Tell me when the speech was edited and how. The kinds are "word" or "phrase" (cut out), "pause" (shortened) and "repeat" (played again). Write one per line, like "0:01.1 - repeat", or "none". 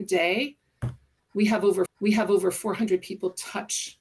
0:01.9 - repeat